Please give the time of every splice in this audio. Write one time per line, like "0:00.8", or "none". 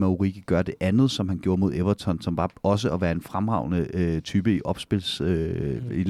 none